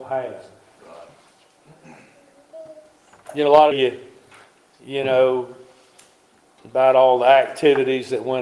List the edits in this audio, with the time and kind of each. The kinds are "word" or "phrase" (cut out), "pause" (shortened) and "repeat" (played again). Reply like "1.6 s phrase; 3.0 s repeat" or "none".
3.7 s phrase